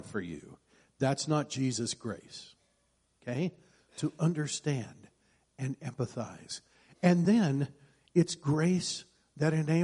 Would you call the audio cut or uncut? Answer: uncut